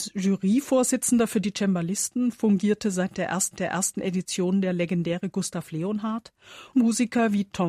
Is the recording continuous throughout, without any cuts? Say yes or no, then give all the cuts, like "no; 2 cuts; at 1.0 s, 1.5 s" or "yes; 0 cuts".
no; 2 cuts; at 3.5 s, 6.7 s